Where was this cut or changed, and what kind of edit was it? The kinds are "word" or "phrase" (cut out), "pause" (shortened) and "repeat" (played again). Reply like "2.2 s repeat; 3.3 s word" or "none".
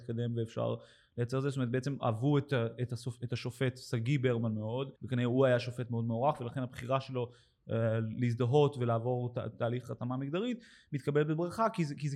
5.0 s pause